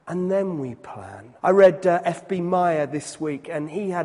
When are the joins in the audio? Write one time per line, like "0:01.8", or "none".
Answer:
0:01.4

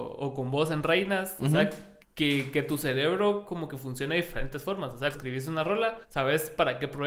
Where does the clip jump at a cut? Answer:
0:02.0
0:05.1
0:06.0

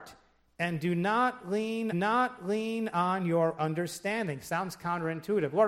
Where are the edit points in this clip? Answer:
0:01.9
0:03.6

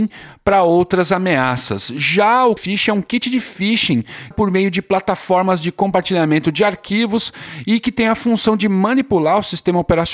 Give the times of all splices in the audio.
0:02.6
0:04.3

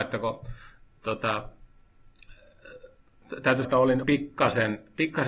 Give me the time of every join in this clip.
0:03.6
0:04.0

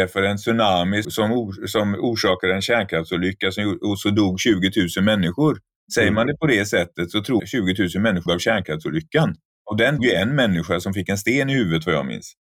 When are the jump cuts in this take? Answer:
0:01.0
0:07.4
0:08.3
0:10.0

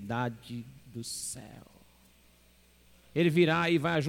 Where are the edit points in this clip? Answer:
none

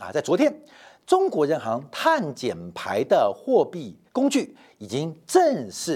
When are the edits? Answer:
0:04.1

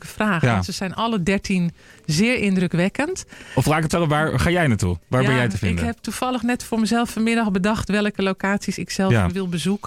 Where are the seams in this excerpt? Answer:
0:03.9

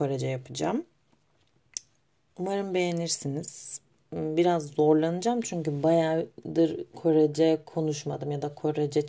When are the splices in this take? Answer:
none

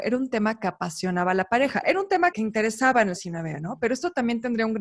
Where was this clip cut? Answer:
0:02.3
0:03.2

